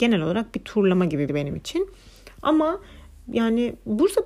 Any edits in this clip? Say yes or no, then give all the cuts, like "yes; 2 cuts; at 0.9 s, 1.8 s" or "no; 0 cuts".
yes; 1 cut; at 1.3 s